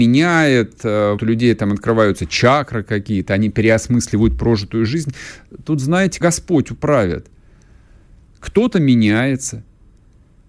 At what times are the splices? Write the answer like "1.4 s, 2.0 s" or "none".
1.2 s, 6.2 s